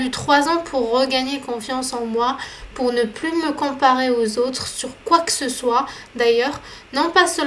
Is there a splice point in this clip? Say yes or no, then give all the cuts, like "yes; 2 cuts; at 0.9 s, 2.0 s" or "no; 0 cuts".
no; 0 cuts